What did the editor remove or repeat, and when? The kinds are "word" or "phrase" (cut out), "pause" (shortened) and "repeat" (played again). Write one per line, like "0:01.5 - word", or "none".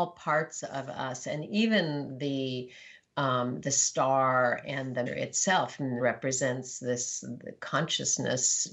0:05.1 - word
0:06.0 - word